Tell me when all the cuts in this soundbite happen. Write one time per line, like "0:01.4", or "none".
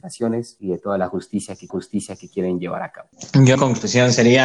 0:01.7
0:03.5